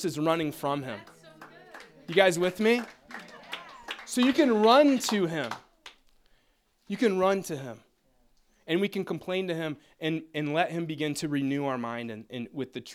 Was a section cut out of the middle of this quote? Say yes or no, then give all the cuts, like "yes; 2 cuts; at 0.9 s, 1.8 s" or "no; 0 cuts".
no; 0 cuts